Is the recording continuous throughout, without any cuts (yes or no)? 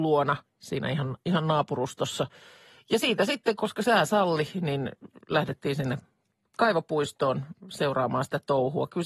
yes